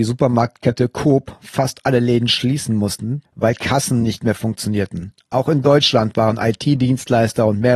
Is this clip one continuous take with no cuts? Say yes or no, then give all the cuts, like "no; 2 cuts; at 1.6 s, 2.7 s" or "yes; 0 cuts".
yes; 0 cuts